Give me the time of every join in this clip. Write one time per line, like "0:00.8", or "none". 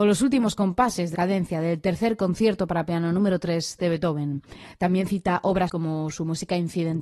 0:01.1
0:05.7

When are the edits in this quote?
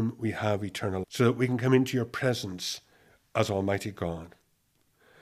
0:01.0

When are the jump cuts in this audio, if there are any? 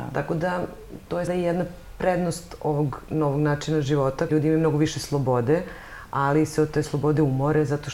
0:01.3
0:04.3

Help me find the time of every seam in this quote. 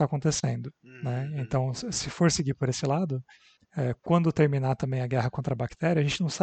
none

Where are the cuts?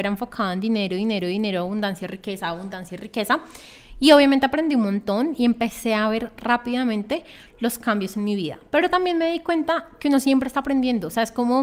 none

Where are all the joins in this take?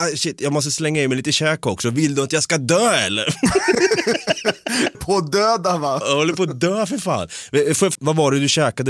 0:04.9
0:07.9

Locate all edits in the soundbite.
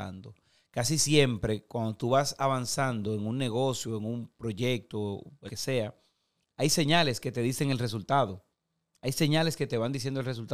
0:05.5

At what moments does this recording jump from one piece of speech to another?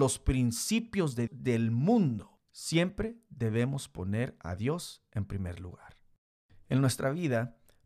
0:01.3

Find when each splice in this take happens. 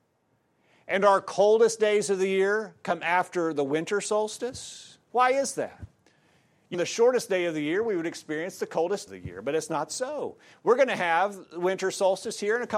0:05.0
0:06.7
0:09.1

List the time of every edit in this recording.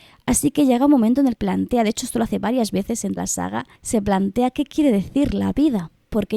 0:01.4
0:03.2
0:03.8

